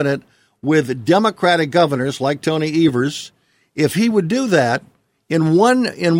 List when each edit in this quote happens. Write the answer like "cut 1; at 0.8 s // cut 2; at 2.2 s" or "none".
none